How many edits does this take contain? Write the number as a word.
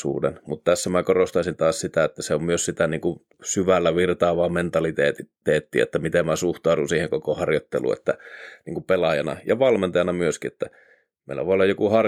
one